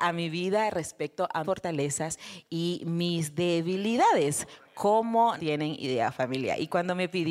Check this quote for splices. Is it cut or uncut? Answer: cut